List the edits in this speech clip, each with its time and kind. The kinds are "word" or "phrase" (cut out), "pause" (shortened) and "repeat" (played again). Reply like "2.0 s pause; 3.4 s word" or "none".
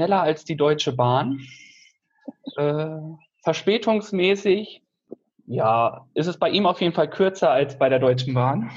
none